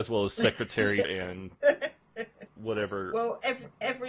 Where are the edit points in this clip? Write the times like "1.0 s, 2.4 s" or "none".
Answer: 1.0 s